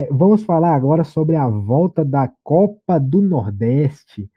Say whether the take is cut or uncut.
uncut